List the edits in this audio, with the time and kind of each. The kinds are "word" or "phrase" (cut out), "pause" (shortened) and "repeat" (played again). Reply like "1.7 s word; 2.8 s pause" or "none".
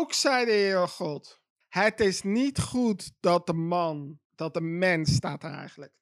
1.6 s pause; 4.2 s pause